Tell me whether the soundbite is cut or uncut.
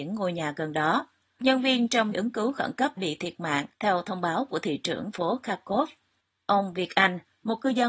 cut